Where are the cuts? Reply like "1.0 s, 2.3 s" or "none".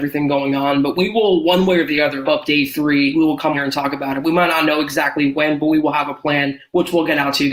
2.2 s, 3.5 s